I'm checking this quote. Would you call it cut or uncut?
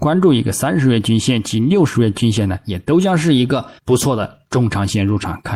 cut